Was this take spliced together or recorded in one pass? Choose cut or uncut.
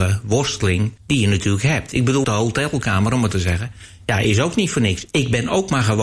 cut